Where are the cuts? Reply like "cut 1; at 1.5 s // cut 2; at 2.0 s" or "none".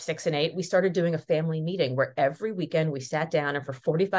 none